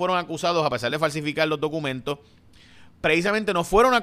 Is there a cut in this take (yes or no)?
no